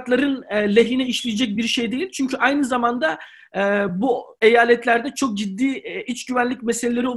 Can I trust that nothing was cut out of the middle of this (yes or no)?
yes